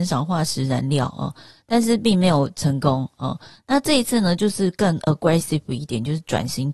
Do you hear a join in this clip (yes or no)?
no